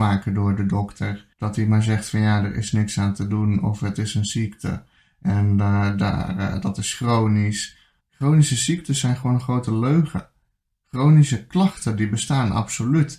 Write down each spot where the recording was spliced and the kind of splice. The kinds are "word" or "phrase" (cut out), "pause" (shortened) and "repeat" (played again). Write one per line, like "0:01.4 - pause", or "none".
0:01.3 - pause
0:08.0 - pause